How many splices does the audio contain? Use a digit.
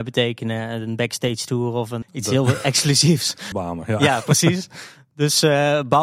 2